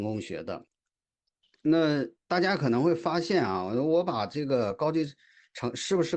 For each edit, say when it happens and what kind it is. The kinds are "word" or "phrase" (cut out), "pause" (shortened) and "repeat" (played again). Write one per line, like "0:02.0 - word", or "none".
none